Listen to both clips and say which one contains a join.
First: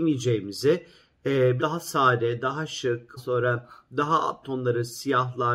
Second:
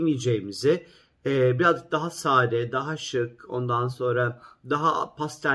first; 3 cuts; at 1.6 s, 3.2 s, 4.4 s

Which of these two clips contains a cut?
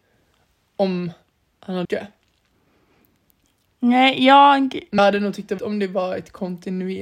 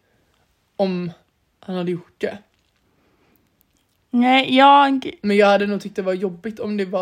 first; 3 cuts; at 1.8 s, 5.0 s, 5.6 s

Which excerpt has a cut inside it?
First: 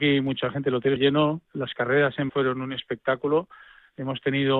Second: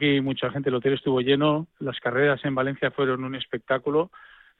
first; 2 cuts; at 1.0 s, 2.3 s

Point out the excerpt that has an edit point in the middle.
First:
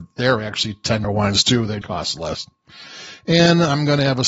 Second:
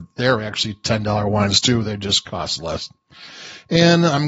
first; 2 cuts; at 1.0 s, 1.8 s

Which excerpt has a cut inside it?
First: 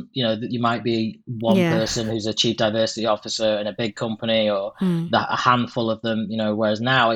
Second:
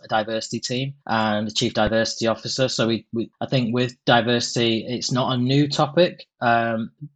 second; 1 cut; at 1.0 s

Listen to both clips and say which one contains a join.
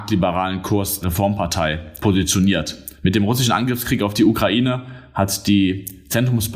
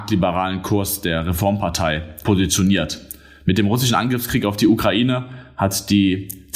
first; 2 cuts; at 1.0 s, 2.9 s

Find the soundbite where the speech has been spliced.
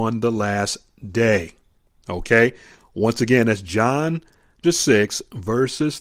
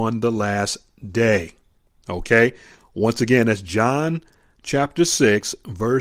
first; 1 cut; at 4.6 s

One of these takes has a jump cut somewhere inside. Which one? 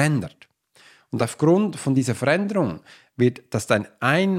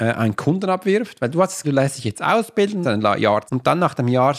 second; 3 cuts; at 1.6 s, 2.8 s, 3.5 s

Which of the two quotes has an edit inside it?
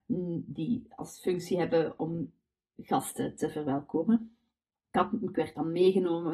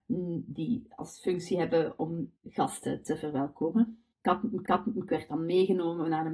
second; 3 cuts; at 2.4 s, 4.1 s, 4.7 s

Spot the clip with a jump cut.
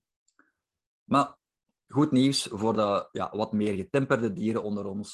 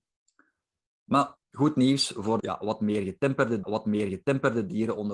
second; 3 cuts; at 1.4 s, 2.4 s, 3.6 s

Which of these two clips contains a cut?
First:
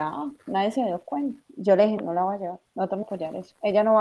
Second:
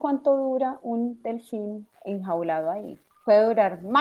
first; 2 cuts; at 2.0 s, 3.0 s

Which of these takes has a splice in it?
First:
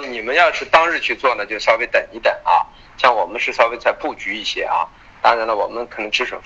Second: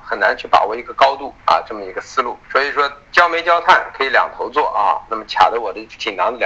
second; 2 cuts; at 1.4 s, 2.4 s

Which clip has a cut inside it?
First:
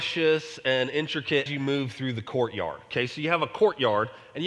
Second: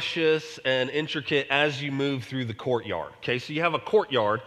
first; 1 cut; at 1.5 s

